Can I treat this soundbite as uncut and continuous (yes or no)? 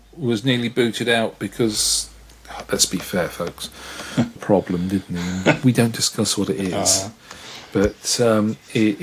no